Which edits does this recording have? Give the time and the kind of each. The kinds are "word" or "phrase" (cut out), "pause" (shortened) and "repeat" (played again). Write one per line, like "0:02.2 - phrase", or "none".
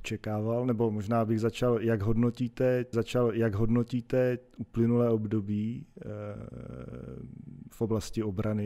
0:02.9 - repeat